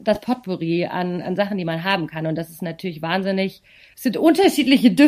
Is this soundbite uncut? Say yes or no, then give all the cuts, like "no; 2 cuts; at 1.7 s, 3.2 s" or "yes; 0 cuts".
yes; 0 cuts